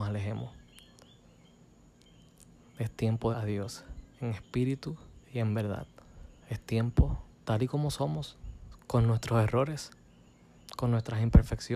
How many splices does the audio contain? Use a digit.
5